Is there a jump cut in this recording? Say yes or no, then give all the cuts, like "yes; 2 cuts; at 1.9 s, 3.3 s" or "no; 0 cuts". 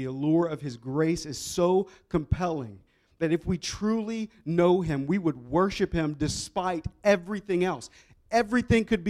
no; 0 cuts